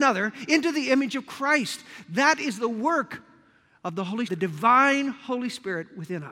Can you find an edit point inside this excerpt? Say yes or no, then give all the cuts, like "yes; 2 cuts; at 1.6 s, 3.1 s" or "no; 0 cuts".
yes; 1 cut; at 4.3 s